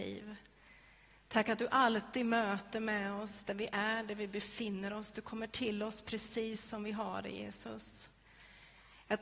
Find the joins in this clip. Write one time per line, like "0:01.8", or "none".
none